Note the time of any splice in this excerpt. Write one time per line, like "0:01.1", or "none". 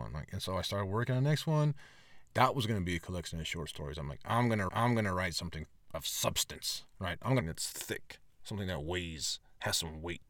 0:02.3
0:04.7
0:07.4